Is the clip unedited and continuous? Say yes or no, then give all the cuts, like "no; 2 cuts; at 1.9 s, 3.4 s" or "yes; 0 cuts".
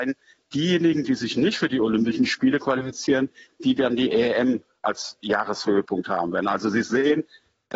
yes; 0 cuts